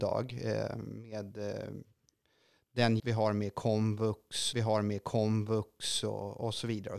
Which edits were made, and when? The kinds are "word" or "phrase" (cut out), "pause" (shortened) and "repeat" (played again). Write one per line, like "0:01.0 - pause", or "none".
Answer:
0:03.0 - word
0:04.5 - repeat

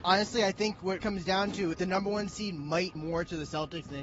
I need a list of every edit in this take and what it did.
0:01.0 - word
0:01.7 - word
0:03.0 - word

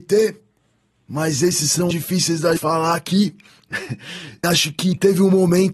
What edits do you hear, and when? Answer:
0:01.9 - word
0:02.6 - word
0:04.4 - word

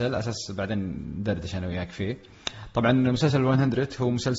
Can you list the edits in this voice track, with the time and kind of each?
none

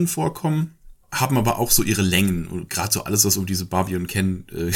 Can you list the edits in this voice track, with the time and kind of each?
0:01.0 - pause

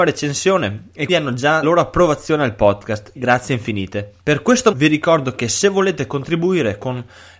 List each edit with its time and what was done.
0:01.1 - word
0:01.6 - phrase
0:03.2 - word
0:04.2 - pause
0:04.7 - word

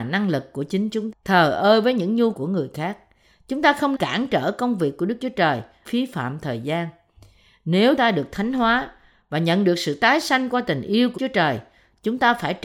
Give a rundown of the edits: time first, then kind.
0:01.1 - word
0:02.3 - word
0:03.9 - word
0:05.9 - word
0:08.0 - word
0:11.2 - word

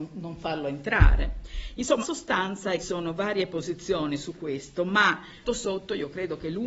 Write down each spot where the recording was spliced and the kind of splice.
0:02.0 - word
0:02.8 - phrase
0:05.4 - word

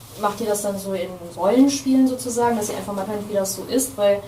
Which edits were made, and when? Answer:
0:01.3 - word
0:03.1 - word

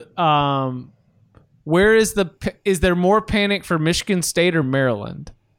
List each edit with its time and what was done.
none

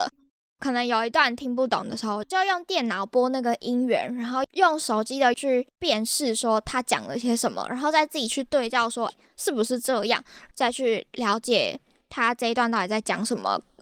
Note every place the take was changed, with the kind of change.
0:05.3 - phrase
0:09.1 - word

